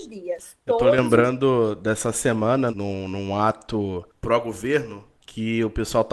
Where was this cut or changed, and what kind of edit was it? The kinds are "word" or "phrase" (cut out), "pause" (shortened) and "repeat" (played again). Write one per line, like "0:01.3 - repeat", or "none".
0:02.7 - word